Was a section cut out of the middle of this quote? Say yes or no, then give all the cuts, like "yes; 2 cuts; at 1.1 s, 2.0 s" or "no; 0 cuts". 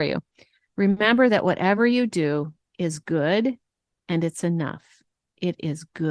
no; 0 cuts